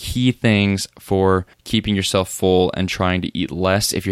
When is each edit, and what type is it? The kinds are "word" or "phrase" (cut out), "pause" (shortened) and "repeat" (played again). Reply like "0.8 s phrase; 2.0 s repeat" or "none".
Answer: 1.5 s pause